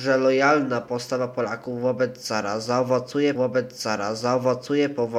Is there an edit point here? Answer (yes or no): yes